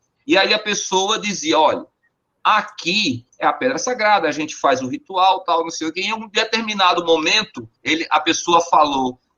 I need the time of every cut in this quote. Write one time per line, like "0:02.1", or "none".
0:03.3
0:07.8